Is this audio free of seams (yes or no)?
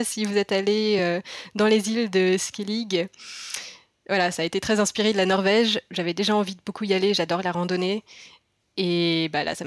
yes